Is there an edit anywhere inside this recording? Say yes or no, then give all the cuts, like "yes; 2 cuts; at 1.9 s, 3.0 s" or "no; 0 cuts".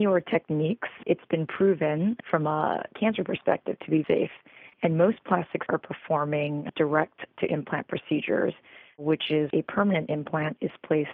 yes; 4 cuts; at 4.0 s, 4.7 s, 5.7 s, 9.5 s